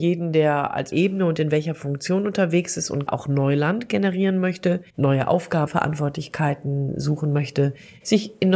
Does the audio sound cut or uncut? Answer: cut